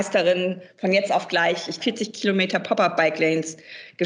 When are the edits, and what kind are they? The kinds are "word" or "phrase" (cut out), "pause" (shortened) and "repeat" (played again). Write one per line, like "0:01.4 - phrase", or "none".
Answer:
0:01.8 - word